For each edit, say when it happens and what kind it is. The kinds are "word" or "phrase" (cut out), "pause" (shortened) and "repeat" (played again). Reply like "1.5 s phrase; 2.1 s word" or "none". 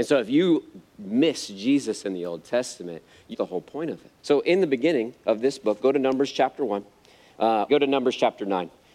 3.3 s word; 4.2 s pause; 7.7 s word